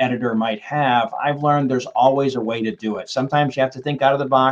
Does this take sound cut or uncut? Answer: uncut